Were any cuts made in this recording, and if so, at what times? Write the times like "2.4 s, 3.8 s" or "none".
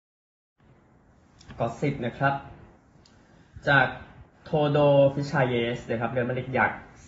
4.3 s